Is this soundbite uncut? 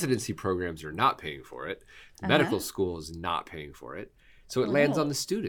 yes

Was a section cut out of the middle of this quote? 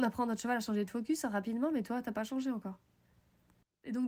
no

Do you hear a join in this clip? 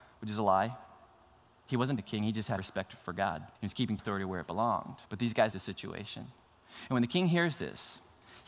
yes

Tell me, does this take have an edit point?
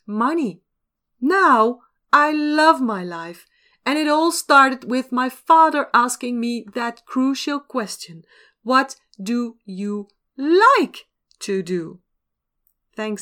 no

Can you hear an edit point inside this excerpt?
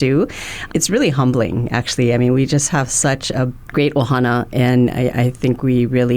no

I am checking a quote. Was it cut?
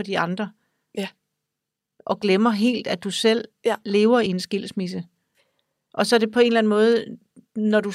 no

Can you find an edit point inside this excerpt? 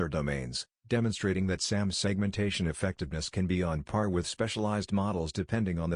no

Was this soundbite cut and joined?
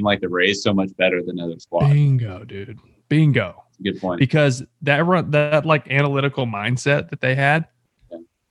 no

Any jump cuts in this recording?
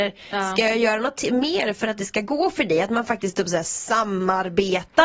no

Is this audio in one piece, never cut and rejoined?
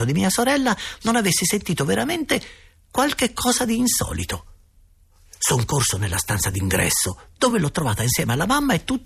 yes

